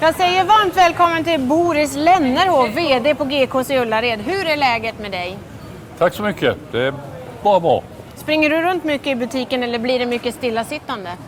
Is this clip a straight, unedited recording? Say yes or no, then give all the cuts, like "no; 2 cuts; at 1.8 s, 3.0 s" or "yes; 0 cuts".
yes; 0 cuts